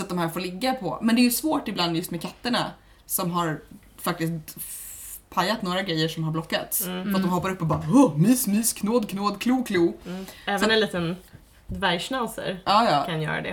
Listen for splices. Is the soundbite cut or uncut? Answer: uncut